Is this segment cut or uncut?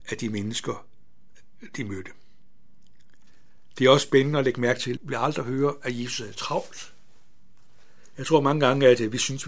cut